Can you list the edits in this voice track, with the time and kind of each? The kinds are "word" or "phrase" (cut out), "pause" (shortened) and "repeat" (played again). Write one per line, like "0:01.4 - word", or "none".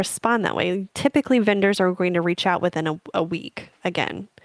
none

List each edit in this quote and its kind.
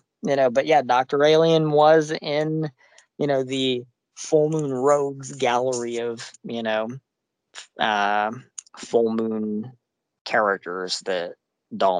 none

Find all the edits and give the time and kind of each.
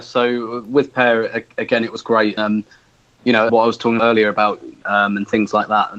0:02.4 - word
0:03.5 - phrase
0:04.0 - word
0:04.8 - phrase

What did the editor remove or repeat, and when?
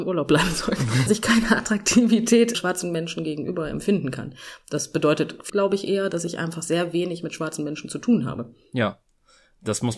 0:01.1 - word
0:02.5 - word
0:05.5 - word

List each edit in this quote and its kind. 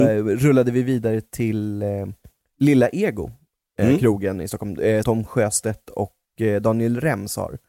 0:05.0 - word

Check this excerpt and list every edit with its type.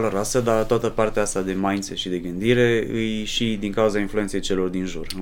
none

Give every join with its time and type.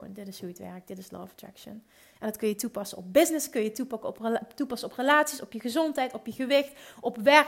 none

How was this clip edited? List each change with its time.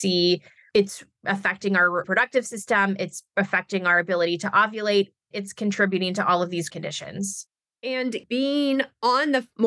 0:05.3 - word
0:06.7 - word

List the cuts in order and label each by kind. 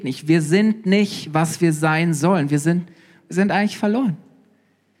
none

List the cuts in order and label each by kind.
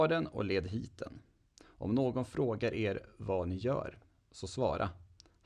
none

